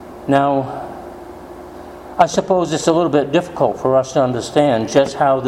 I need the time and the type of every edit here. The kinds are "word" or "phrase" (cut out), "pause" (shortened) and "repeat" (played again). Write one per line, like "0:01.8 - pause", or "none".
none